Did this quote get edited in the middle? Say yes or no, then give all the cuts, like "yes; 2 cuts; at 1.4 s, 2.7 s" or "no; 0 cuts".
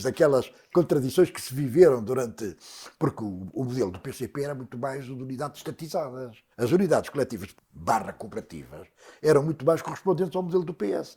yes; 2 cuts; at 6.5 s, 7.5 s